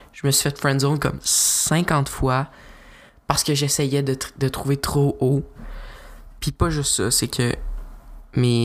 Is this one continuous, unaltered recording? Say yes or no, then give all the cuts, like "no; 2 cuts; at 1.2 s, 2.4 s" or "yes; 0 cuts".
yes; 0 cuts